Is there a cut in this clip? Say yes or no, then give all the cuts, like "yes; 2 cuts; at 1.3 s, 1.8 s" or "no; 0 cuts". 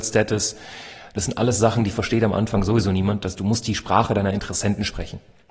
no; 0 cuts